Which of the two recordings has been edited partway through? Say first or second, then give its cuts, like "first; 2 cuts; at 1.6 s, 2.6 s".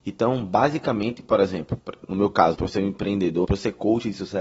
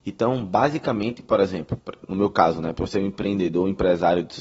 first; 2 cuts; at 2.5 s, 3.4 s